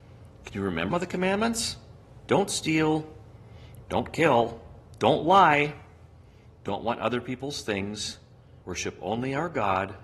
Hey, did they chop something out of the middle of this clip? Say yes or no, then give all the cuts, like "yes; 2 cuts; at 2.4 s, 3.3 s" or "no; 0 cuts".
yes; 2 cuts; at 0.9 s, 8.6 s